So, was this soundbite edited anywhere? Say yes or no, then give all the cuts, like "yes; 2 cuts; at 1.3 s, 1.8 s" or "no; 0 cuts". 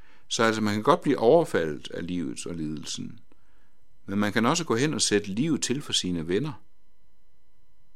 no; 0 cuts